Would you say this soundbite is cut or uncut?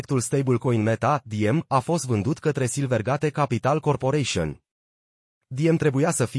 uncut